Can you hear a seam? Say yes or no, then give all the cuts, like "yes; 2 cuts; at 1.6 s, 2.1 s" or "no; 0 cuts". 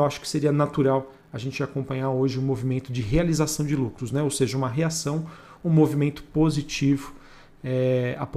no; 0 cuts